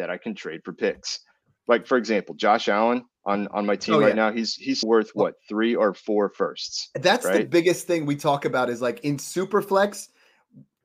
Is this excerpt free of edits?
no; 2 cuts; at 3.1 s, 4.8 s

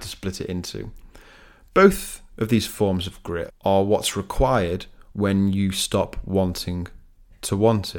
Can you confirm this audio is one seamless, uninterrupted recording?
no; 1 cut; at 3.5 s

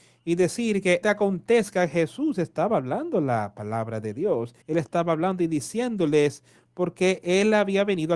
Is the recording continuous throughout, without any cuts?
no; 2 cuts; at 1.0 s, 4.6 s

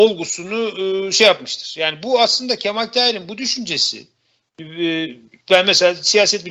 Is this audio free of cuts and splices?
yes; 0 cuts

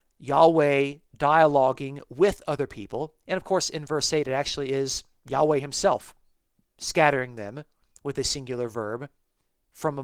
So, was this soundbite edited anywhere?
no; 0 cuts

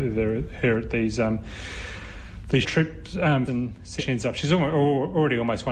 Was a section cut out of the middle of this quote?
yes; 3 cuts; at 2.6 s, 3.5 s, 4.0 s

